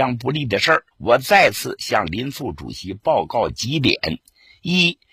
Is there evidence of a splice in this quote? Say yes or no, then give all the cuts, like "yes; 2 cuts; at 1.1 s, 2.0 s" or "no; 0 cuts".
yes; 1 cut; at 0.9 s